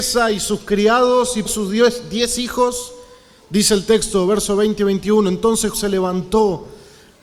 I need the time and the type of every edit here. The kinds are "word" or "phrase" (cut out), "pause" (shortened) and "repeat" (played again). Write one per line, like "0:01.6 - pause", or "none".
0:01.5 - word
0:05.7 - word